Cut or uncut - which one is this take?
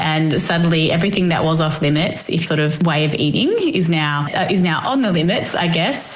cut